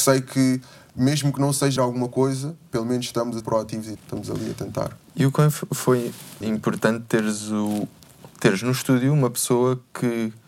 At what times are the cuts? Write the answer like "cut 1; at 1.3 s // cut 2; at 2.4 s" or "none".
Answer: cut 1; at 1.8 s // cut 2; at 3.4 s // cut 3; at 4.0 s // cut 4; at 6.4 s // cut 5; at 8.3 s